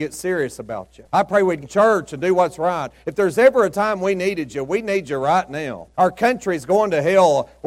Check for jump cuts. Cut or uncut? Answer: cut